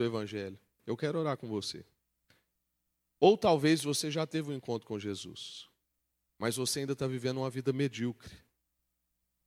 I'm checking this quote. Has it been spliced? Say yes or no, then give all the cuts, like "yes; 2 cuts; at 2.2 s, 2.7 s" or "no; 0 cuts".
no; 0 cuts